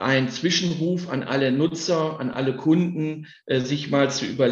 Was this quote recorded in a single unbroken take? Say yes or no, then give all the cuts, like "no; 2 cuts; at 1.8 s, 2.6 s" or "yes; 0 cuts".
yes; 0 cuts